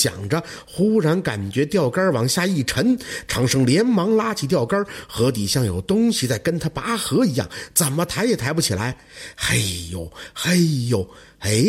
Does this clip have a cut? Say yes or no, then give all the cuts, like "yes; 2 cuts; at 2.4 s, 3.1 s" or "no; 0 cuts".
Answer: no; 0 cuts